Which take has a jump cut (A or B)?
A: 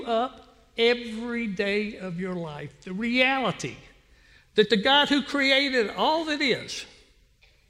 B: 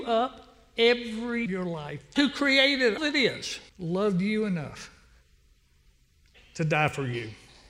B